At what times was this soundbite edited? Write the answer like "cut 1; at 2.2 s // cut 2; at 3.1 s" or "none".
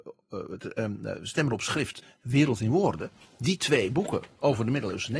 none